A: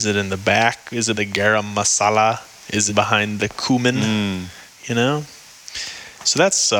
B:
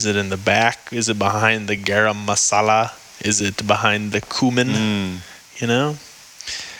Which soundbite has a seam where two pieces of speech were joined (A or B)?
A